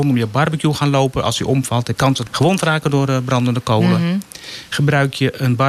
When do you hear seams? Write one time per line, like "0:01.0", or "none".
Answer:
0:02.0
0:02.3